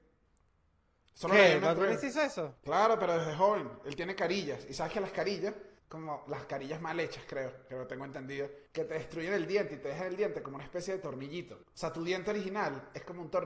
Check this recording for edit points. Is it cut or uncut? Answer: cut